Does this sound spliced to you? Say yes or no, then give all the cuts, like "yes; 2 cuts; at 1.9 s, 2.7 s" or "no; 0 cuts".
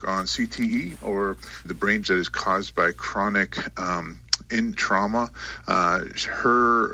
yes; 3 cuts; at 1.6 s, 2.0 s, 4.8 s